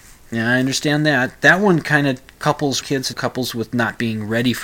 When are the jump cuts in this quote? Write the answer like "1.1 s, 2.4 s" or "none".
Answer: 2.8 s, 3.1 s